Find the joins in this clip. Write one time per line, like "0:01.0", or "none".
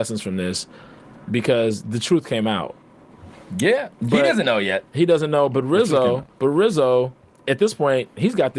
0:03.9
0:06.3
0:07.4